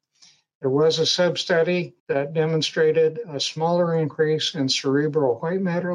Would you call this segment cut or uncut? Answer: cut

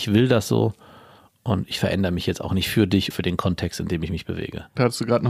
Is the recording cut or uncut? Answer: cut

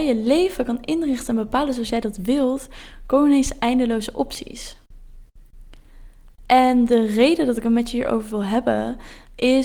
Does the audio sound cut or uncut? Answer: uncut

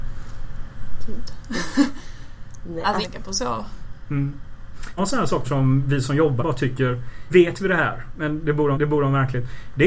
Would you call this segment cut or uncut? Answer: cut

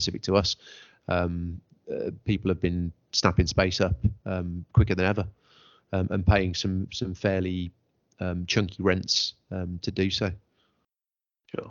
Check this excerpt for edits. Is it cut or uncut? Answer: uncut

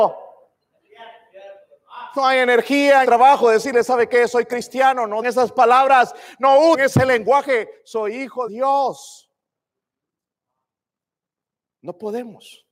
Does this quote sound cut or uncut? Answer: cut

